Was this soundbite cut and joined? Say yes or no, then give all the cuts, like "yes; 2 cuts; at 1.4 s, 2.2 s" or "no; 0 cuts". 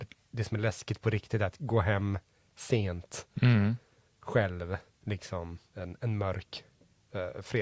no; 0 cuts